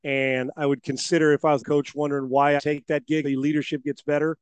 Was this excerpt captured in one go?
no; 3 cuts; at 1.6 s, 2.6 s, 3.2 s

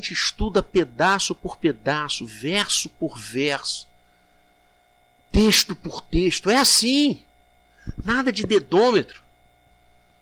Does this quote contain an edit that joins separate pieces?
no; 0 cuts

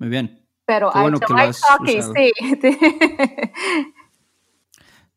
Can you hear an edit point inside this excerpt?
yes; 1 cut; at 1.2 s

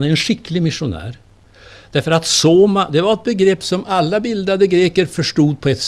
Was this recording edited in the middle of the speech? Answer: no; 0 cuts

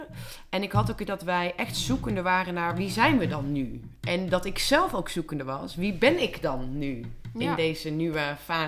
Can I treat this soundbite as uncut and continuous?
no; 1 cut; at 1.1 s

